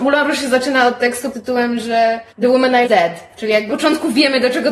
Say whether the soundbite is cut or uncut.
cut